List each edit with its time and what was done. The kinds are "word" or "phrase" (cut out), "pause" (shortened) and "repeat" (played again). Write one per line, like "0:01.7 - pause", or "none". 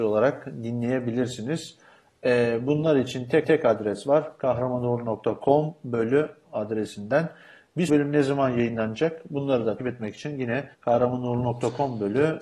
0:03.4 - repeat
0:06.4 - word
0:07.9 - word
0:09.8 - word
0:10.7 - pause